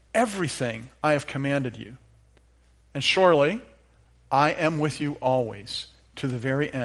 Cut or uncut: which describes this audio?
uncut